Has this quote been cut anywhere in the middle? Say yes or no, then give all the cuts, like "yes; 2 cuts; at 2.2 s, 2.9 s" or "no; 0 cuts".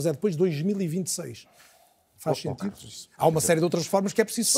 no; 0 cuts